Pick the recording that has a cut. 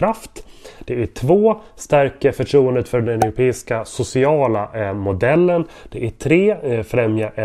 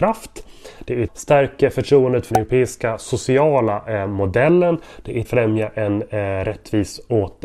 second; 3 cuts; at 1.1 s, 2.3 s, 5.2 s

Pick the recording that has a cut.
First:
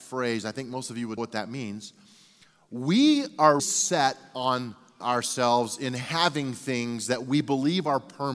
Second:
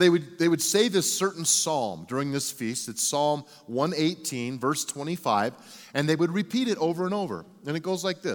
first; 3 cuts; at 1.2 s, 3.6 s, 5.0 s

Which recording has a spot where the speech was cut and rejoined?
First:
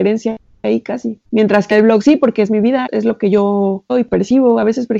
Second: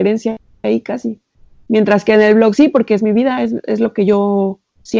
first; 4 cuts; at 1.3 s, 1.7 s, 2.9 s, 3.9 s

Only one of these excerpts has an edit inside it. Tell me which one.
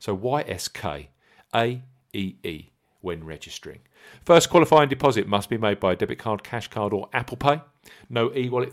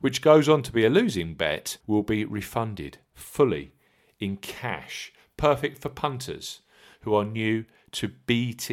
second; 1 cut; at 1.8 s

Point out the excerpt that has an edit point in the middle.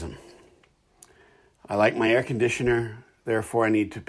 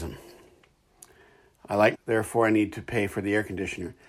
second; 1 cut; at 1.9 s

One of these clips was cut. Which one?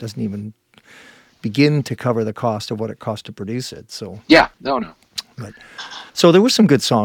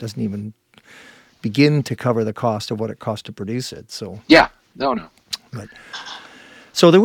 first; 2 cuts; at 4.5 s, 6.1 s

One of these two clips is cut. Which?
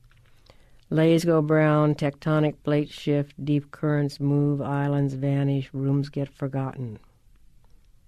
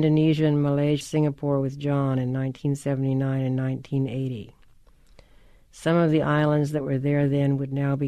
second; 1 cut; at 1.0 s

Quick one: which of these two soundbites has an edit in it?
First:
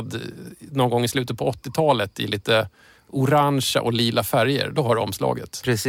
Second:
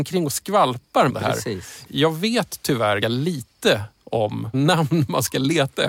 second; 3 cuts; at 1.1 s, 3.0 s, 4.5 s

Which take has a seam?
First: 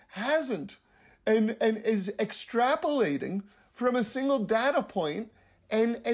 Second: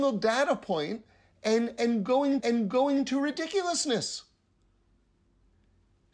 second; 1 cut; at 2.4 s

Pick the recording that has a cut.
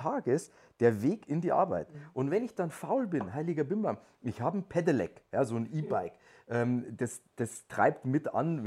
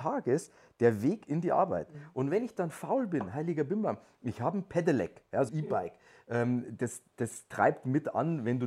second; 1 cut; at 5.5 s

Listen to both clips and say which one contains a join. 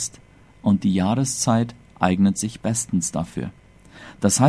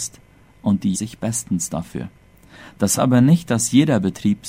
second; 2 cuts; at 0.9 s, 3.0 s

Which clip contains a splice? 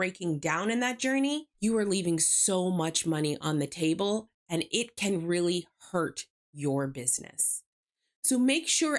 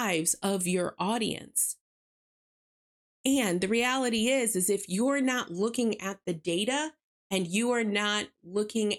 first; 1 cut; at 1.5 s

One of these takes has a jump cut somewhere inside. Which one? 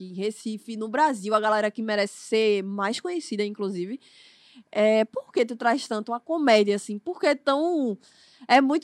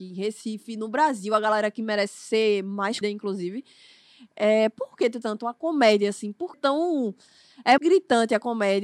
second; 4 cuts; at 3.0 s, 5.2 s, 6.5 s, 7.8 s

